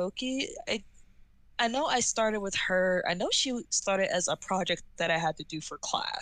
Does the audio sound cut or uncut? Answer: uncut